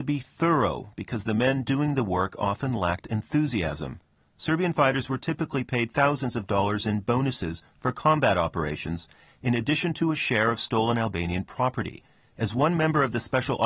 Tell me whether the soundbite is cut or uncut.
uncut